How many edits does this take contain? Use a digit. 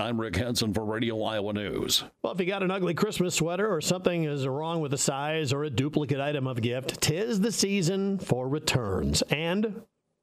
1